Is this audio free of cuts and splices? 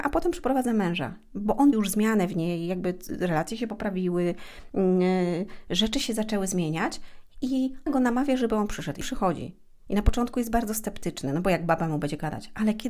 no; 3 cuts; at 1.7 s, 7.9 s, 9.0 s

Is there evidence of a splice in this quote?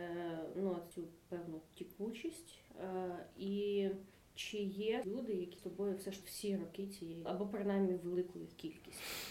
yes; 7 cuts; at 0.9 s, 2.7 s, 4.1 s, 5.0 s, 5.6 s, 6.2 s, 7.3 s

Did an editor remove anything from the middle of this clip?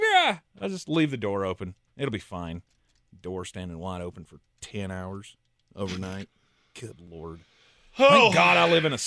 no; 0 cuts

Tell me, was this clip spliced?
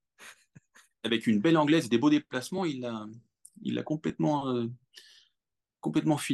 no; 0 cuts

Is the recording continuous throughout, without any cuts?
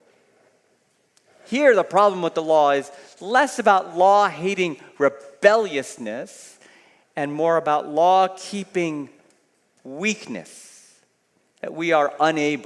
yes; 0 cuts

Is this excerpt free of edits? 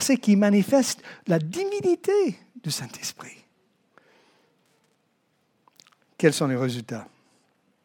yes; 0 cuts

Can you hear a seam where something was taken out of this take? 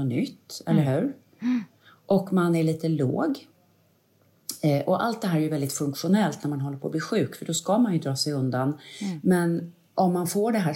no; 0 cuts

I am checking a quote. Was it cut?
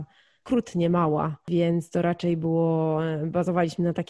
no; 0 cuts

